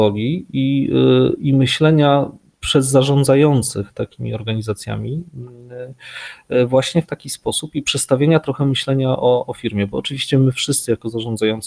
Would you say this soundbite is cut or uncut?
uncut